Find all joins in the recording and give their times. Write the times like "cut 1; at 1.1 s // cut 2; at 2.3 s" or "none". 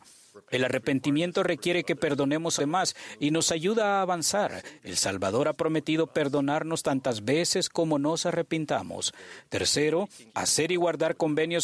cut 1; at 2.6 s // cut 2; at 10.3 s